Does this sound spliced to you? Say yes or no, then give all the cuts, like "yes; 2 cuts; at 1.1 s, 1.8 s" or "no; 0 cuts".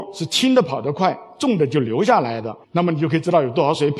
yes; 1 cut; at 2.6 s